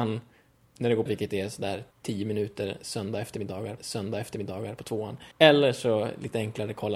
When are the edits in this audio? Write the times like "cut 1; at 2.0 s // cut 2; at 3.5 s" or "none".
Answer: cut 1; at 1.1 s // cut 2; at 1.9 s // cut 3; at 3.8 s // cut 4; at 5.3 s